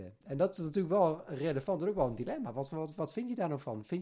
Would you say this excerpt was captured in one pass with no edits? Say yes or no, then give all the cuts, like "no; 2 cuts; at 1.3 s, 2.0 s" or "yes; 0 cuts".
yes; 0 cuts